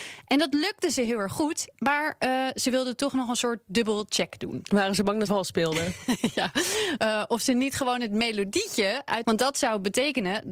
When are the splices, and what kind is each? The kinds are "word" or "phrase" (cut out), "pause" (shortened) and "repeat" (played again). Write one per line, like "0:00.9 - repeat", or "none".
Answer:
0:05.3 - word
0:09.2 - phrase